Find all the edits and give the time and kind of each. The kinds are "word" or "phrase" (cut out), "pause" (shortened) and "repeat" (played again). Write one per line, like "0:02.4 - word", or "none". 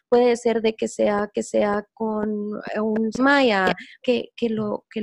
0:01.3 - repeat
0:03.2 - word
0:04.0 - phrase